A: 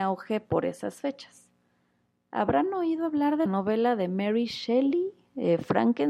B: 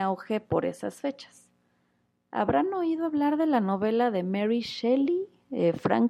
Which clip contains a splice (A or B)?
A